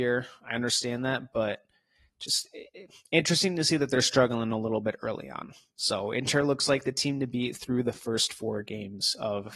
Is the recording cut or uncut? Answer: uncut